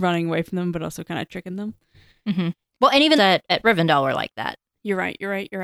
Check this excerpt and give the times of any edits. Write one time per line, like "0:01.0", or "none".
0:03.2